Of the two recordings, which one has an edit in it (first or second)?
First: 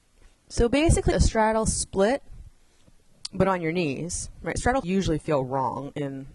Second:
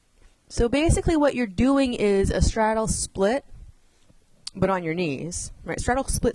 first